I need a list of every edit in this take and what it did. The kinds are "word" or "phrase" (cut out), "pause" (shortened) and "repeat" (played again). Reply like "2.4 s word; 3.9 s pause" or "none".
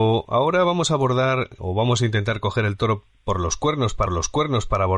1.6 s word; 4.1 s repeat